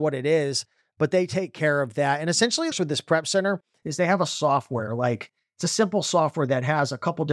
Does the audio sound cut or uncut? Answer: cut